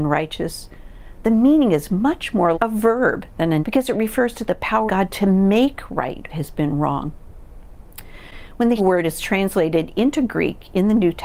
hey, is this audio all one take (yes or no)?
no